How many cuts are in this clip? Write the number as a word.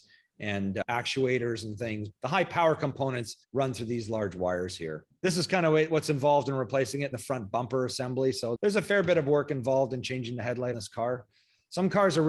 three